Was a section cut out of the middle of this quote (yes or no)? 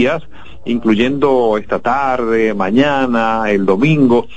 no